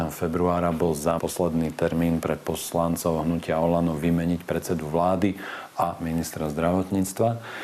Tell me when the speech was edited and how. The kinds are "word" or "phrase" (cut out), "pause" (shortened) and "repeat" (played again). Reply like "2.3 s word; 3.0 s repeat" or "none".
1.2 s word

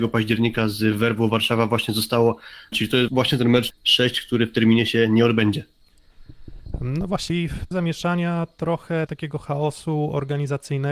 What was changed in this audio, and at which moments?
2.7 s word; 3.1 s word; 3.7 s word; 7.3 s word; 7.7 s word; 9.1 s word

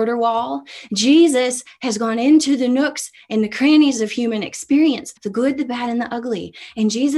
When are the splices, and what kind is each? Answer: 5.2 s pause

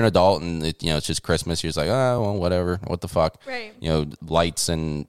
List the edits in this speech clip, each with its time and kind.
none

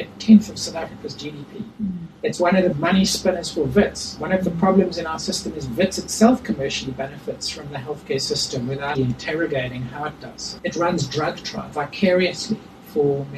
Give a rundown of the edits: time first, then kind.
2.7 s word; 9.0 s word

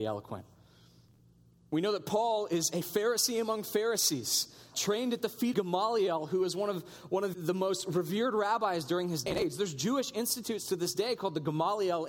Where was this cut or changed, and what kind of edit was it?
4.7 s word; 5.5 s word; 7.3 s word

